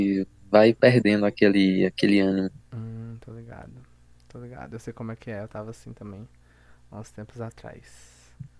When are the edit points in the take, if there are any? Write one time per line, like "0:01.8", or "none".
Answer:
0:02.7